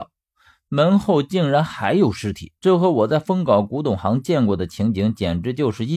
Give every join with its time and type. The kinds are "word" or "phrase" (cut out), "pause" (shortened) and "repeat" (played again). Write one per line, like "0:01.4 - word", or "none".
0:02.6 - pause